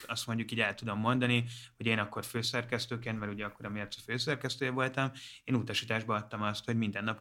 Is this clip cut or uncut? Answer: uncut